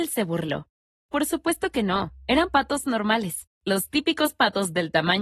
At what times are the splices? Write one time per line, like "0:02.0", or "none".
0:03.5

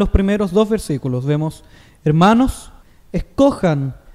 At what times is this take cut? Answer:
0:02.8

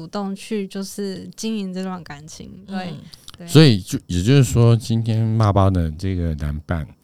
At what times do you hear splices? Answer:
none

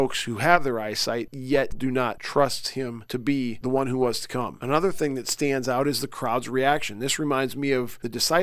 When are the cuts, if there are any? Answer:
0:01.7

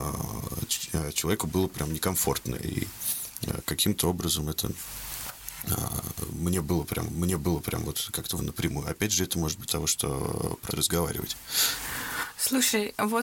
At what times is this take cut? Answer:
0:02.5
0:07.1
0:08.4
0:09.7
0:10.7

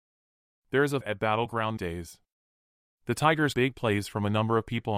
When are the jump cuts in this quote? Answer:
0:01.0
0:01.8
0:03.5

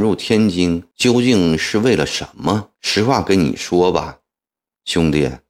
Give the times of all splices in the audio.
0:00.9
0:02.7

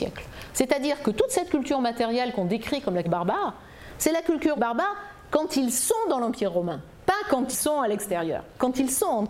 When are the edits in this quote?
0:03.0
0:04.6
0:07.5

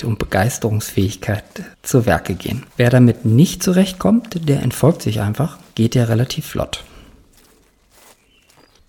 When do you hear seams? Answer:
0:01.7
0:02.7

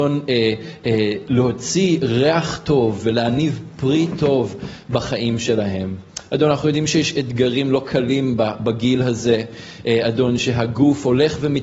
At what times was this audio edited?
none

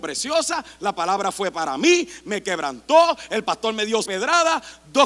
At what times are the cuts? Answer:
0:04.0

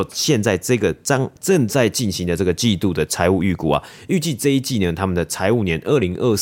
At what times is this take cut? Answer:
0:01.4

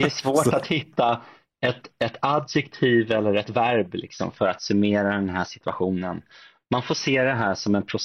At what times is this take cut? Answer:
none

